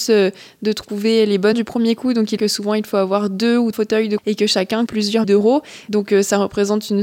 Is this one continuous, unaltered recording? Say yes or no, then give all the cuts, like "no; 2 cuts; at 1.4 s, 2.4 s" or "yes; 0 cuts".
no; 6 cuts; at 1.5 s, 2.4 s, 3.7 s, 4.2 s, 4.9 s, 5.2 s